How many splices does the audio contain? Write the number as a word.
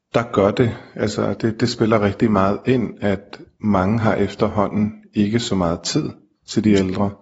one